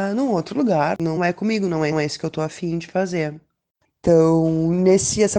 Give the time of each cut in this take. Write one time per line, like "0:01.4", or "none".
0:01.2
0:01.9